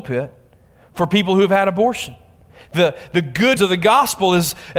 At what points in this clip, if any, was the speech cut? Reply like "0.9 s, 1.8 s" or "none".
3.6 s